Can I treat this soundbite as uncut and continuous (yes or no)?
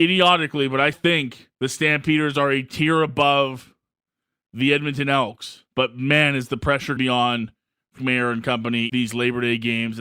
no